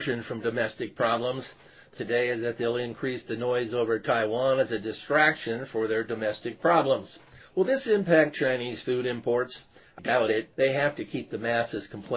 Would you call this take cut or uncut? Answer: cut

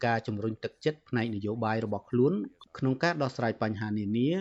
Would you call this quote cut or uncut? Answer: uncut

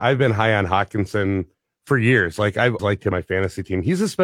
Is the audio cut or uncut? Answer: cut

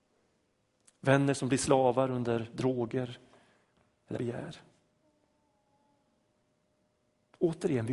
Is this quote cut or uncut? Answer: cut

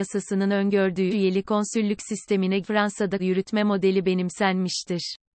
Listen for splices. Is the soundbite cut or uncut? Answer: cut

